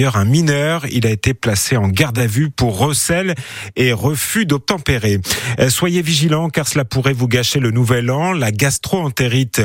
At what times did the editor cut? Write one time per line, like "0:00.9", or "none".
none